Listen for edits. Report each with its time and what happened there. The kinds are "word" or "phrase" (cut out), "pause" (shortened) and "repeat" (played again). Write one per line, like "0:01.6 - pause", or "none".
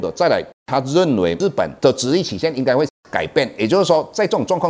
0:01.8 - pause

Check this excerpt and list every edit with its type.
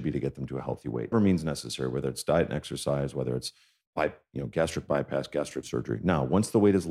0:01.1 - word
0:05.6 - word

